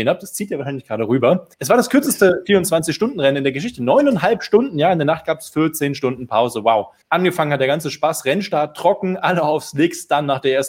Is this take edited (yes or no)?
yes